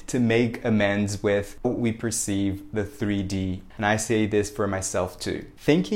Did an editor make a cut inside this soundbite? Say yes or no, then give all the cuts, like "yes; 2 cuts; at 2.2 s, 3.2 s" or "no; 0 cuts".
yes; 2 cuts; at 1.6 s, 3.7 s